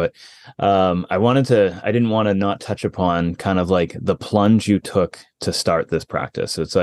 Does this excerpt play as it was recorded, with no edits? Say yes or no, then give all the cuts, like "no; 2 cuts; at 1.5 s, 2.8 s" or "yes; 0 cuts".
yes; 0 cuts